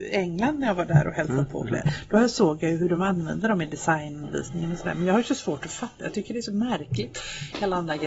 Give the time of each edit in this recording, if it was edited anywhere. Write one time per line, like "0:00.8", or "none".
none